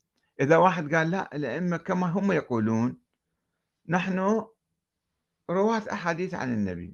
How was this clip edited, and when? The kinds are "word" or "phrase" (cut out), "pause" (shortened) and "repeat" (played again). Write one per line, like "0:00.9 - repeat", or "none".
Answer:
none